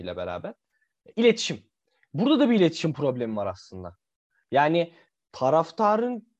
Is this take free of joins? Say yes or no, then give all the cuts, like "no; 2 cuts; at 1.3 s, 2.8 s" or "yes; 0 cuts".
yes; 0 cuts